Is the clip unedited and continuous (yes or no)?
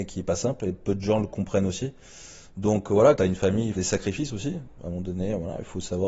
no